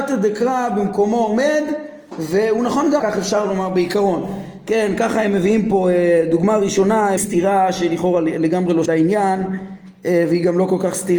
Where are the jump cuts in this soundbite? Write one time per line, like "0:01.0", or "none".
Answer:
0:03.0
0:07.2
0:08.9